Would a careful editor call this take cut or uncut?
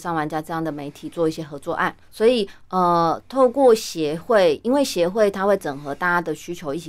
cut